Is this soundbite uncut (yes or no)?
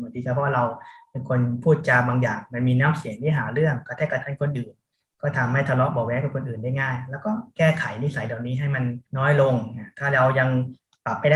no